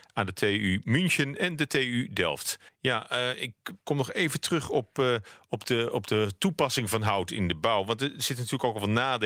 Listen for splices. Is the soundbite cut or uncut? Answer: cut